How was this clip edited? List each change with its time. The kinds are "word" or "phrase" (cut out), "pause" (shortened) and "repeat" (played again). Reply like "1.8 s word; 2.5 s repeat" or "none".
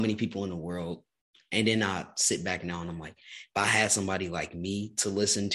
none